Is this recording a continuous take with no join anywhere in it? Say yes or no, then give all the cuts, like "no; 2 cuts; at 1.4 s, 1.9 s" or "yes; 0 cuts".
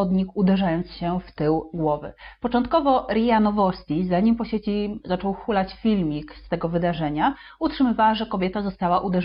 yes; 0 cuts